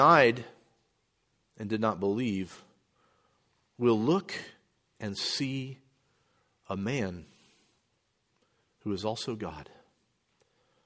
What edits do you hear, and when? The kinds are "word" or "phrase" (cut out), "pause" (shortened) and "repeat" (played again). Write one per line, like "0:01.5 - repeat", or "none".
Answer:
none